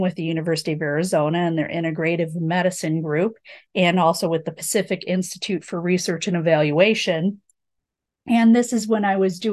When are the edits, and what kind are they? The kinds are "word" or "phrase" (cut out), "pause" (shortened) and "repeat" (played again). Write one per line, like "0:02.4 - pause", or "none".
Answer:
none